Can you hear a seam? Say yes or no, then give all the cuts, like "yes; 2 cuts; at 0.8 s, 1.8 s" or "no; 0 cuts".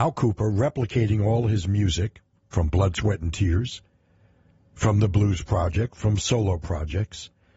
no; 0 cuts